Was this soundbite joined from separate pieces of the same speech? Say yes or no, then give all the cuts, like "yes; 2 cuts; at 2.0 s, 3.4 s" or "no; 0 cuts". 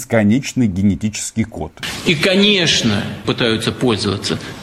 yes; 1 cut; at 3.2 s